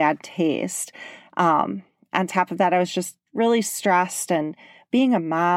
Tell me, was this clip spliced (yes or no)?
no